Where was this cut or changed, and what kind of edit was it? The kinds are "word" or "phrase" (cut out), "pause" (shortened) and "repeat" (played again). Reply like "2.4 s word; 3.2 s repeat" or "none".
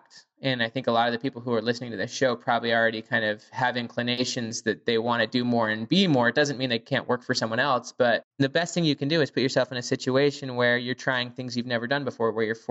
8.3 s pause